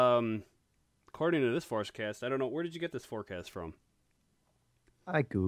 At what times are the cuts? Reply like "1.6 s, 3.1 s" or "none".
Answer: none